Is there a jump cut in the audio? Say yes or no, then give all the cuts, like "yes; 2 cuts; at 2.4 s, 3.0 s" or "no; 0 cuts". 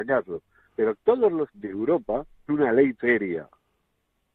yes; 4 cuts; at 1.0 s, 1.5 s, 2.5 s, 2.9 s